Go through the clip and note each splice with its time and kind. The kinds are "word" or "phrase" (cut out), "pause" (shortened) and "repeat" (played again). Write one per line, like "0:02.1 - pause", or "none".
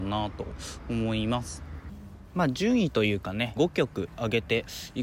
0:03.6 - phrase